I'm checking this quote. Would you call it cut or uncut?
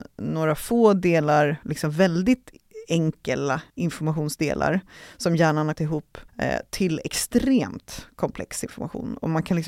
cut